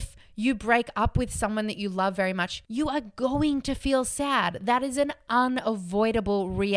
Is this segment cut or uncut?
uncut